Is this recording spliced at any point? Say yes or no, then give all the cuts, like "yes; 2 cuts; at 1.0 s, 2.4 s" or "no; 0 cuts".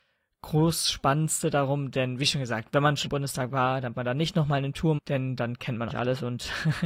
yes; 4 cuts; at 3.1 s, 3.9 s, 5.0 s, 5.9 s